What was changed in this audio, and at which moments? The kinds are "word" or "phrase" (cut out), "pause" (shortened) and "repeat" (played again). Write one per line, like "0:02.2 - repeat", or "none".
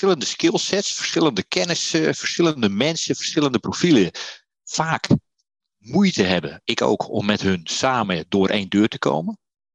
none